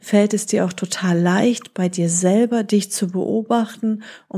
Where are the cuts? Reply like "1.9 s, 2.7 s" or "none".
none

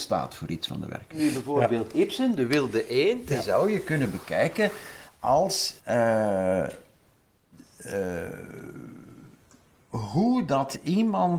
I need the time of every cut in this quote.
5.8 s

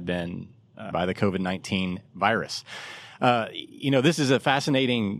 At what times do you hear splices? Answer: 0.9 s

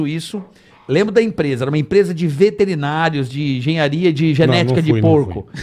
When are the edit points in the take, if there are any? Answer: none

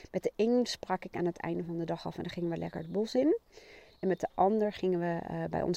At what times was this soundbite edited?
none

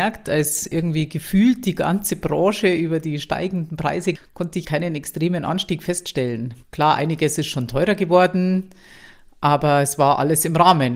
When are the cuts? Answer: 4.2 s, 4.6 s, 6.6 s

